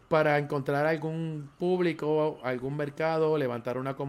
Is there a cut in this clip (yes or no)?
no